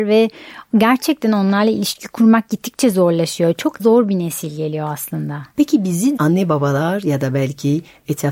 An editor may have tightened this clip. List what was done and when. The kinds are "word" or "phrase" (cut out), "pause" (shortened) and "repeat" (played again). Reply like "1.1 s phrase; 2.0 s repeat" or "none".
3.8 s word; 6.2 s word